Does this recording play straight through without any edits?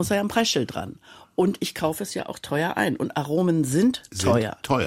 yes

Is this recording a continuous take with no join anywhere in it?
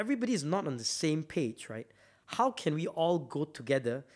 yes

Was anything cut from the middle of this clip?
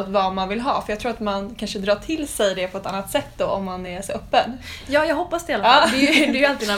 no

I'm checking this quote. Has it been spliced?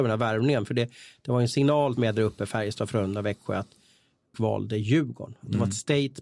yes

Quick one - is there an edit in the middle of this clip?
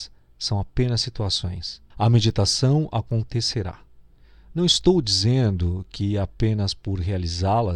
yes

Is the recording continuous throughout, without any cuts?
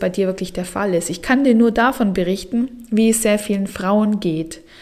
yes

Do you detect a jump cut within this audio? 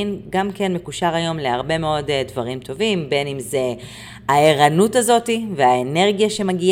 no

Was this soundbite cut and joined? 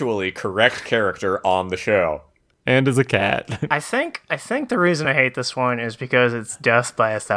no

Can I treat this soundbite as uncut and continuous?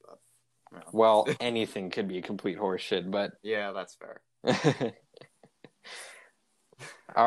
no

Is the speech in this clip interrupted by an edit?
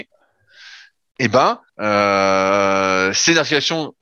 yes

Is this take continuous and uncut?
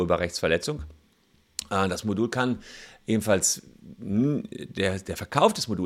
yes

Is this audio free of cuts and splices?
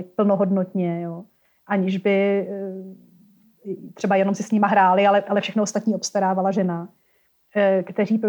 yes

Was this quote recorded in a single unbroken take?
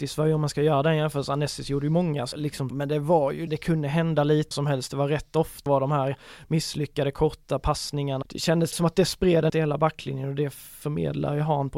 no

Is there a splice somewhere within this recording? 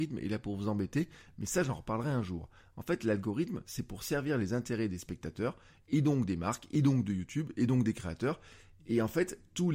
no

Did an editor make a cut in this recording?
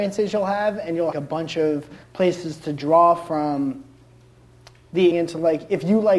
yes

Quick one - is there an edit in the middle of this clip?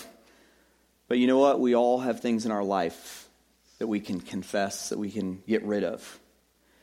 no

